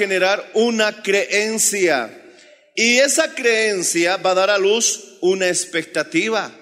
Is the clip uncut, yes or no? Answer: yes